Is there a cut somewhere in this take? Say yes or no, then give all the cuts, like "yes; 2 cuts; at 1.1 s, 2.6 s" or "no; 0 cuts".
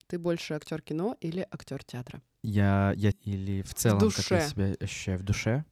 yes; 1 cut; at 3.1 s